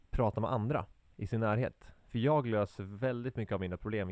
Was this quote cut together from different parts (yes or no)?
no